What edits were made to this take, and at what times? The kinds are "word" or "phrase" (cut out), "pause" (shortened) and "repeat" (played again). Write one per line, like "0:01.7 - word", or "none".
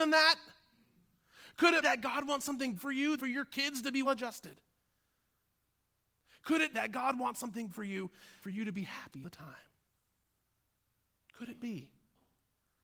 0:01.8 - word
0:02.8 - word
0:03.2 - word
0:04.0 - word
0:06.7 - word
0:07.7 - word
0:08.4 - word
0:09.2 - word